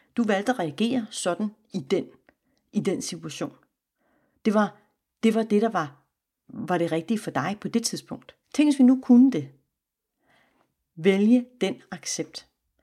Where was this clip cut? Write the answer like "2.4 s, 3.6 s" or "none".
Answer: 8.4 s